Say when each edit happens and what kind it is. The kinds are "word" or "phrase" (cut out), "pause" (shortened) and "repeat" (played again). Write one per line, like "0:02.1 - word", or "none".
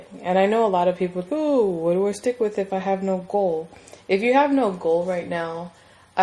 0:01.3 - word